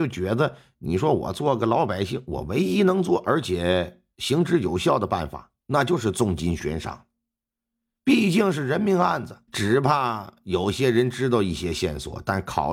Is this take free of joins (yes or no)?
no